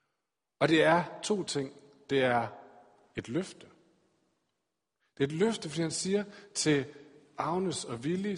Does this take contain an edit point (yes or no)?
no